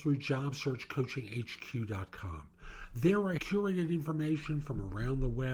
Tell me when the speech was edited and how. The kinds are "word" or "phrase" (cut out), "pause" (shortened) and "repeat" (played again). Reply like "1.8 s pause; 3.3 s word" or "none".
3.4 s word